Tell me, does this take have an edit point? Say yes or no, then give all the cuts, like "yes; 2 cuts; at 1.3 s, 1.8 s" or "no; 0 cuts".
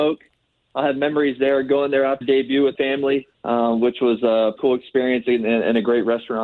yes; 4 cuts; at 2.2 s, 2.7 s, 3.3 s, 4.6 s